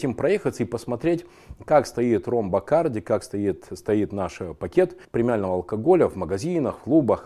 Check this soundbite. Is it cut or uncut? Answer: cut